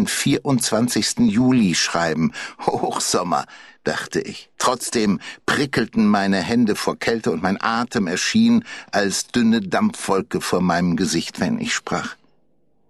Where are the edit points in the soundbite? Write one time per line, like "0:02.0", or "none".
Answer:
0:04.5